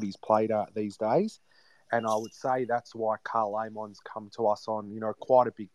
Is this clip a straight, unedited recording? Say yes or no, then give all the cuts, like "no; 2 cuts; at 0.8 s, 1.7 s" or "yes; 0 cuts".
yes; 0 cuts